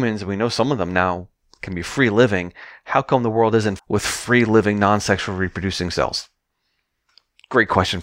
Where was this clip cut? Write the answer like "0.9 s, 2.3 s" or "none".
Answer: 3.8 s